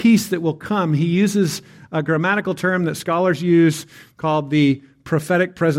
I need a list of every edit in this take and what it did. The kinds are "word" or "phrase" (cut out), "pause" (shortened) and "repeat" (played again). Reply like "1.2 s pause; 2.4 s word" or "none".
none